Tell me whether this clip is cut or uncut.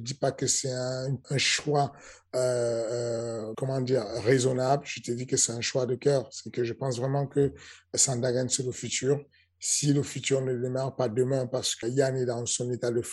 cut